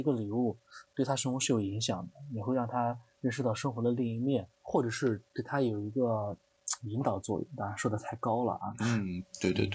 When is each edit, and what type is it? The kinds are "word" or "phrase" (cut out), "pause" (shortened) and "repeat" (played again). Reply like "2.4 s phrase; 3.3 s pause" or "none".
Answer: 4.5 s pause